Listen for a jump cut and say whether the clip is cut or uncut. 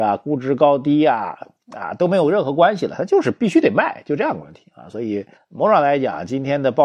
cut